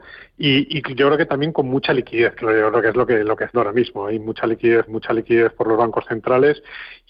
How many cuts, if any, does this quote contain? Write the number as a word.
three